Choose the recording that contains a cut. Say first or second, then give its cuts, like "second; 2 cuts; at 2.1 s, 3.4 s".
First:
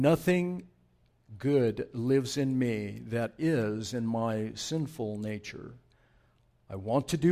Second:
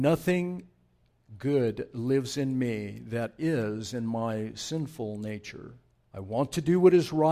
second; 1 cut; at 5.9 s